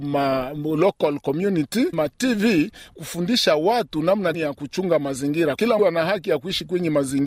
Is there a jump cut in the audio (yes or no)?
yes